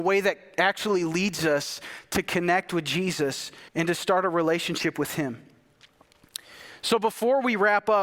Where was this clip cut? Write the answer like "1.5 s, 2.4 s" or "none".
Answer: 3.7 s